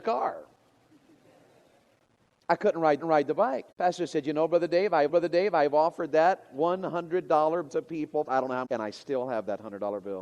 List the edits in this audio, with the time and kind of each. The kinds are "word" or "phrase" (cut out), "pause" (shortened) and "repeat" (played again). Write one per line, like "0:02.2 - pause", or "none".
0:03.0 - repeat
0:03.7 - pause
0:05.1 - repeat
0:07.7 - word
0:08.2 - phrase
0:08.6 - phrase